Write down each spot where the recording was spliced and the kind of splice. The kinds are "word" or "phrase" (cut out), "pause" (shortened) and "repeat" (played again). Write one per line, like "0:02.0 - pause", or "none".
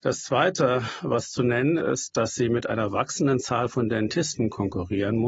0:01.8 - word

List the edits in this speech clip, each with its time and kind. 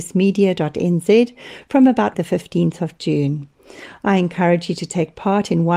0:02.1 - word

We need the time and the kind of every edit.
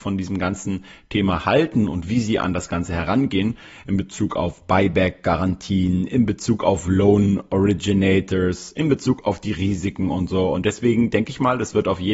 none

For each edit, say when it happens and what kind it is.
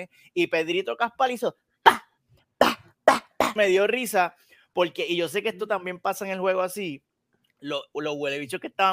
0:03.6 - word

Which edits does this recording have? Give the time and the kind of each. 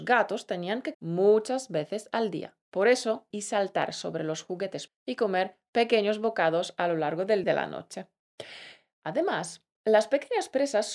0:00.9 - word
0:02.6 - pause
0:03.3 - phrase
0:04.9 - word
0:07.4 - phrase

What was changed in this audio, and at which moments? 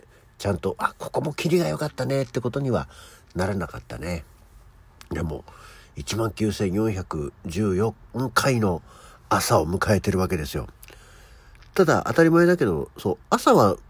none

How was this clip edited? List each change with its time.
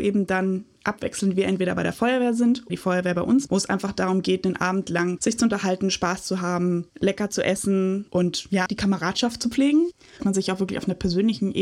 0:02.7 - word
0:03.5 - word
0:05.2 - word
0:08.7 - word
0:10.2 - word

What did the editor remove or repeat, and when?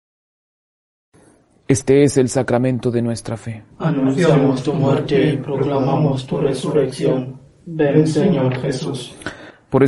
0:03.7 - pause

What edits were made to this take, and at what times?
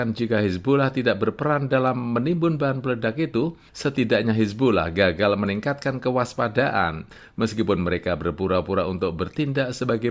none

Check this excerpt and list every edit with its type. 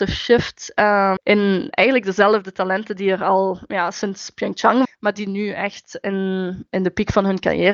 0:01.2 - word
0:04.8 - word

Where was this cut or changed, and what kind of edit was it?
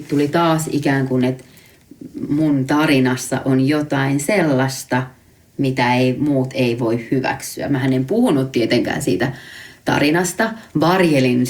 none

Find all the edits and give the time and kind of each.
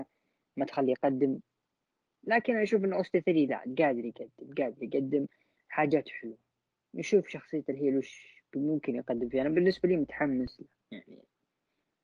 none

